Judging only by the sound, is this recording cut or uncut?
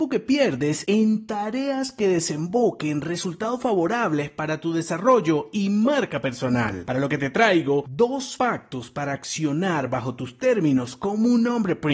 uncut